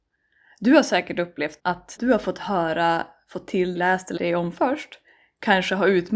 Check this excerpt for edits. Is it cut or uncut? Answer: cut